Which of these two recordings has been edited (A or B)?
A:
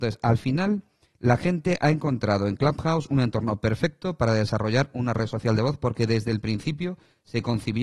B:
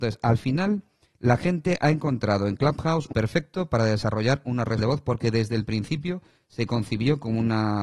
B